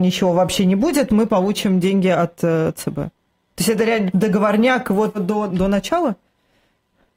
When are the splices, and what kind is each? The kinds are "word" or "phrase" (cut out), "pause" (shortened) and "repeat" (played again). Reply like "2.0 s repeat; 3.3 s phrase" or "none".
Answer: 4.1 s word; 5.1 s word; 5.5 s word